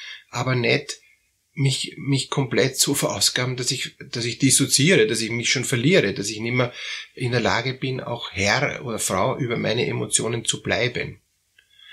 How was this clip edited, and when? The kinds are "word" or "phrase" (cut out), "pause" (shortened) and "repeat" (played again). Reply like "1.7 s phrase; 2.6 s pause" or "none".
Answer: none